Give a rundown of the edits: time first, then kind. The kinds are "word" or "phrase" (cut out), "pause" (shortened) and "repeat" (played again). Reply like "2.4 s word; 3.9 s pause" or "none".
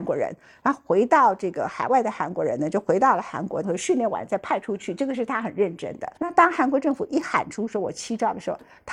3.6 s phrase; 6.2 s pause